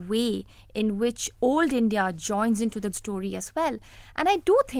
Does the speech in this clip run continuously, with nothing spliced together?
no; 2 cuts; at 1.3 s, 2.9 s

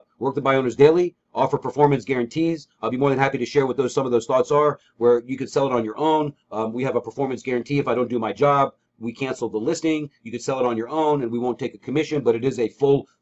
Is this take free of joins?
yes; 0 cuts

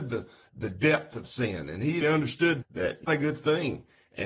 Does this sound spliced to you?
yes; 3 cuts; at 1.2 s, 2.0 s, 3.1 s

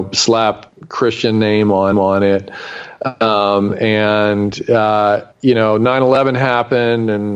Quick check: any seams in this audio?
yes; 2 cuts; at 1.9 s, 5.3 s

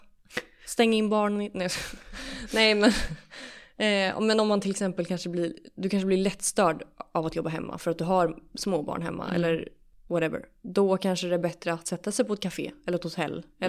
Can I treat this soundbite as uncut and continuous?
yes; 0 cuts

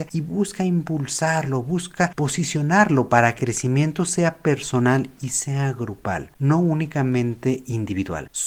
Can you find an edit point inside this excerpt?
yes; 1 cut; at 3.4 s

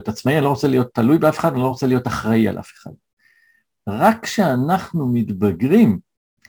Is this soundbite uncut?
yes; 0 cuts

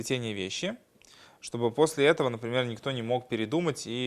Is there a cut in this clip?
no; 0 cuts

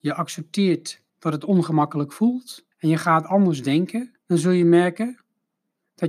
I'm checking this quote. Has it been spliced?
yes; 3 cuts; at 1.1 s, 2.7 s, 4.2 s

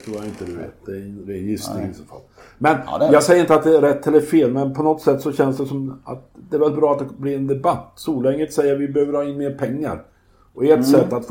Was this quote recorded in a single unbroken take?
yes; 0 cuts

